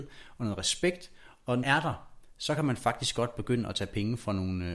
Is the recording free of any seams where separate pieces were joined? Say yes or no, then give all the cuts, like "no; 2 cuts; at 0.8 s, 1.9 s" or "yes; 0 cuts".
no; 1 cut; at 1.6 s